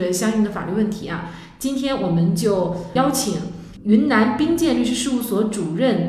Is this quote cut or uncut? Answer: uncut